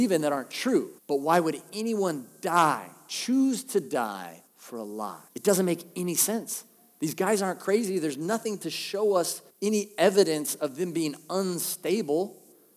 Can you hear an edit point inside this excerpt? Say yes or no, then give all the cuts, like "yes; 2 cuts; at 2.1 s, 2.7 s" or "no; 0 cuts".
yes; 4 cuts; at 1.0 s, 4.5 s, 5.3 s, 9.5 s